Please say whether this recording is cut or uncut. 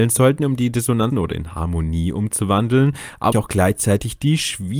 cut